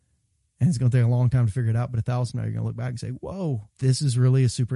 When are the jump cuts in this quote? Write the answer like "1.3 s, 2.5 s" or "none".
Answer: 2.3 s, 3.7 s